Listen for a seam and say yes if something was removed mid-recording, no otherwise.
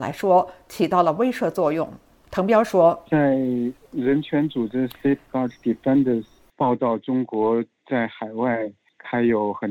no